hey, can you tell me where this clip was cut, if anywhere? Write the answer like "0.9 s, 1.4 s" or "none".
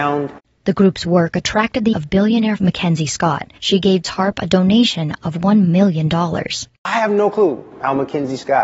1.9 s, 2.6 s, 3.6 s, 4.0 s